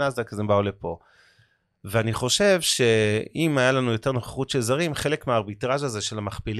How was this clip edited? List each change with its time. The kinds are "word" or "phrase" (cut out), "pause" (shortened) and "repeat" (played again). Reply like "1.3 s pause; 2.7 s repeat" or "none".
none